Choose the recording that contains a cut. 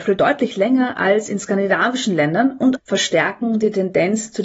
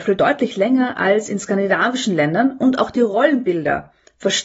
first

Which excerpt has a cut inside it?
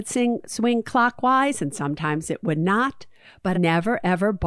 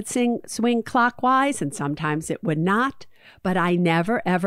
first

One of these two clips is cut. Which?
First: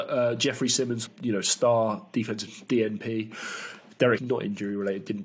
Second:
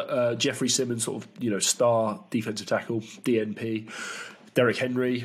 first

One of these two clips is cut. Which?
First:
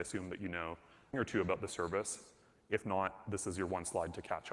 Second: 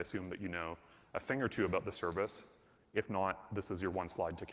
first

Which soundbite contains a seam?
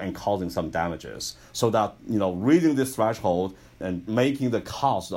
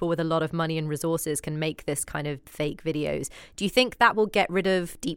second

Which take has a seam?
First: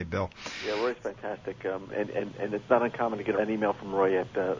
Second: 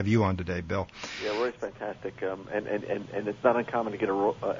first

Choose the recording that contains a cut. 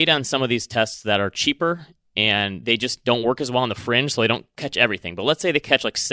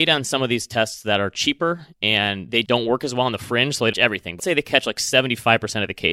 second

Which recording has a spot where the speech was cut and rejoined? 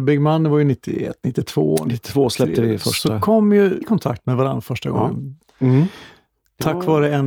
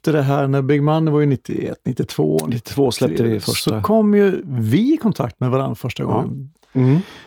first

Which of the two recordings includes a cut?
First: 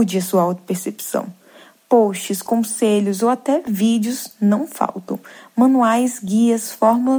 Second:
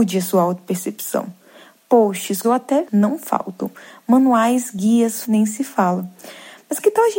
second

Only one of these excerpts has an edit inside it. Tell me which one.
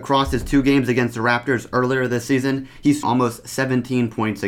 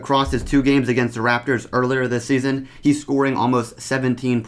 first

